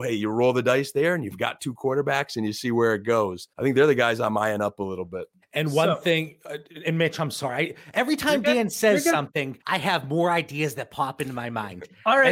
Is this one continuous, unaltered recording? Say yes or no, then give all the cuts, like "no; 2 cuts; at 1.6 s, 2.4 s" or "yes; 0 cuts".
no; 3 cuts; at 3.5 s, 5.4 s, 9.6 s